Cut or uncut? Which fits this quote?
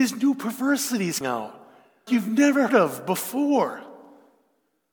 cut